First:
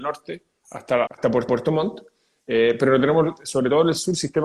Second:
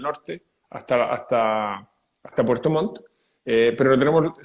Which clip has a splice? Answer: first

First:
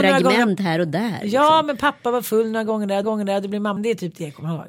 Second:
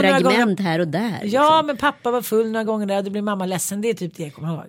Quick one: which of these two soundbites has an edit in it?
first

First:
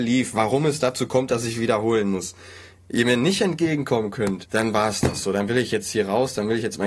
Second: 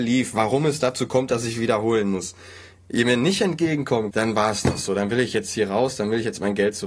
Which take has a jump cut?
second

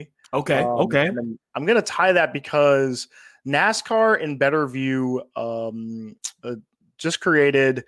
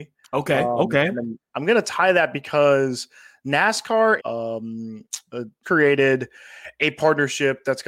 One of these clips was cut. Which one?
second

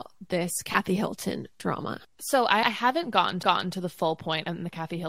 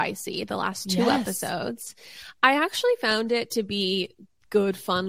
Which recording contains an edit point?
first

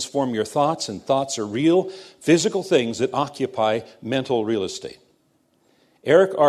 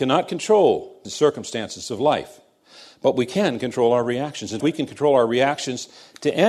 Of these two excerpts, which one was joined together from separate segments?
second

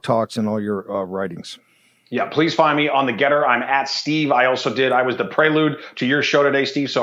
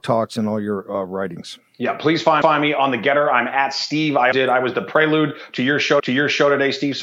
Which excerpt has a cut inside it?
second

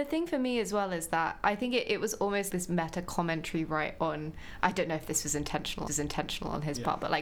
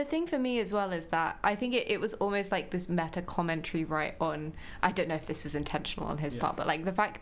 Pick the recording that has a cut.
first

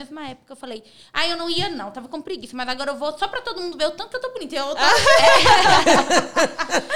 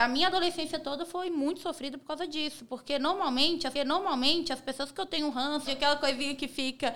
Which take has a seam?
second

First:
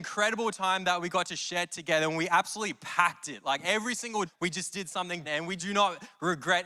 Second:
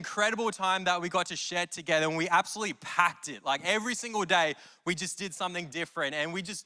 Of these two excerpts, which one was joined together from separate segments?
first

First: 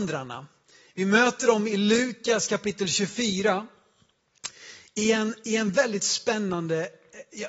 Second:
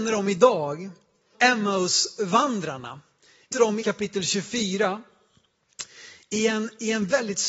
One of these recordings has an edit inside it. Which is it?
second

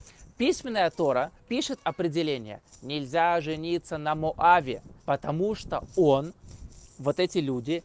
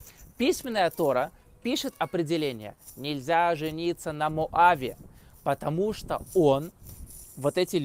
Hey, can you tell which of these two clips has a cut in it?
first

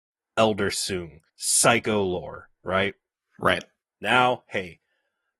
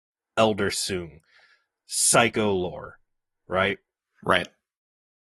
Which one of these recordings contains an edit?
first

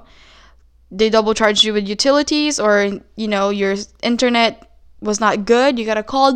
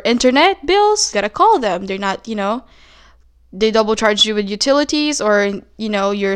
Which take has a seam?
second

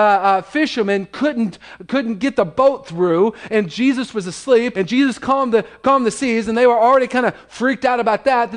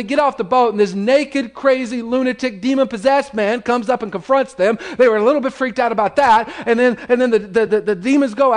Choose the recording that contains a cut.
first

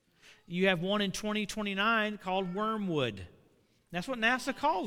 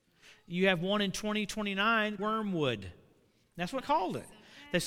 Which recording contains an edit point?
second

